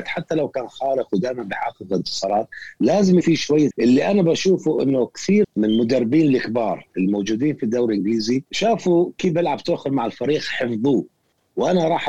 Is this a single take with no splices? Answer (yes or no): no